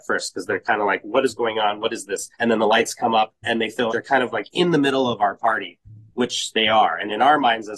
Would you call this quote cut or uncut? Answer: cut